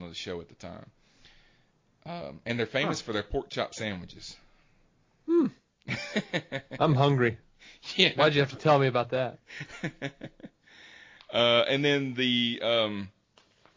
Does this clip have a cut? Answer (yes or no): no